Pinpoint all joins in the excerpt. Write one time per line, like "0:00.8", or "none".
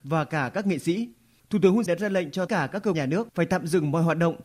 0:01.9
0:02.5
0:02.9